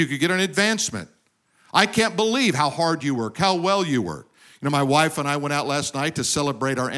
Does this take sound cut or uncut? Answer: uncut